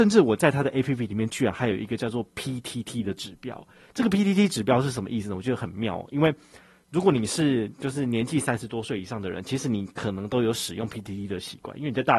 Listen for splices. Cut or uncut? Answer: uncut